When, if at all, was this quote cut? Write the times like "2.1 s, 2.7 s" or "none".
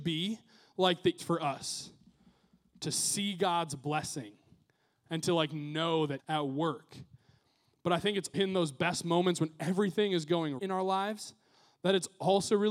1.2 s, 6.2 s, 8.3 s, 10.6 s

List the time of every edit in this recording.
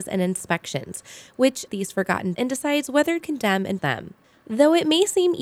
1.7 s, 2.3 s, 3.2 s, 3.8 s

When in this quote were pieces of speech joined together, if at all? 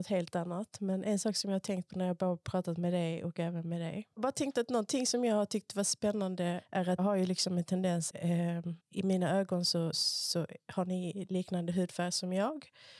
4.1 s, 7.0 s, 8.1 s, 8.8 s, 9.9 s

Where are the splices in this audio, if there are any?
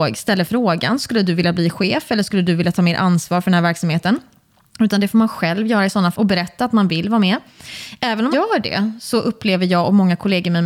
6.1 s, 8.3 s

